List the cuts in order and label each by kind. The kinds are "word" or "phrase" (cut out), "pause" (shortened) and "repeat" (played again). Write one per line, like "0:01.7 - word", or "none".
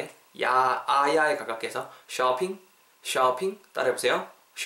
none